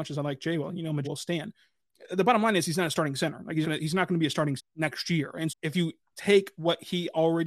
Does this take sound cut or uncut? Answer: cut